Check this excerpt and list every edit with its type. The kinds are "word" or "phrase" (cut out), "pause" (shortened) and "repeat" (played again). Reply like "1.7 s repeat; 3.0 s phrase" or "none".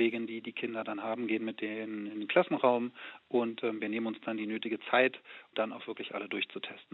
5.5 s word